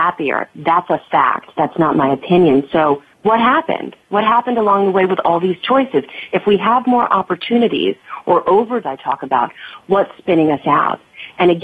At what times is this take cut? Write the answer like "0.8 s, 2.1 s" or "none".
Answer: 3.1 s, 8.8 s